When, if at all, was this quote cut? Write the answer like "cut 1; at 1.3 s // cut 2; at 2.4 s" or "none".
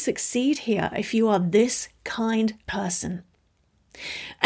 cut 1; at 2.7 s